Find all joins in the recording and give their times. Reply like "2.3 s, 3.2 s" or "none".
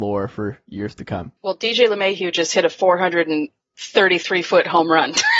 1.4 s